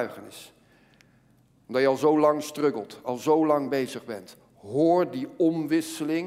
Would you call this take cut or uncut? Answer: uncut